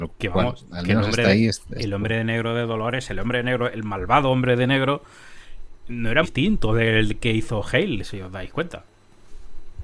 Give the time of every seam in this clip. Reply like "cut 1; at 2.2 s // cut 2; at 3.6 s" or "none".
cut 1; at 6.2 s

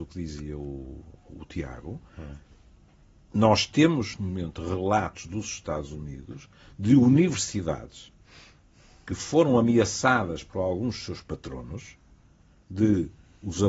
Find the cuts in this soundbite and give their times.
cut 1; at 4.1 s

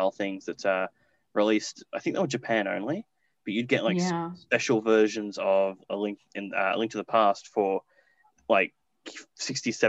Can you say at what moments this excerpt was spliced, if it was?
none

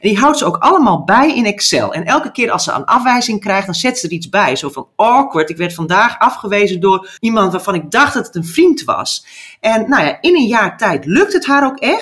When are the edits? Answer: cut 1; at 7.2 s

